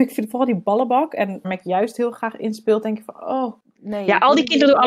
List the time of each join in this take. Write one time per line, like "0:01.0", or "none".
0:01.4